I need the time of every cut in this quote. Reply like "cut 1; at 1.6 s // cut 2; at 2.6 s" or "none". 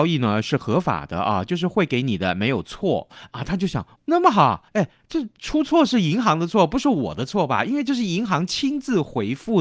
cut 1; at 4.0 s // cut 2; at 4.7 s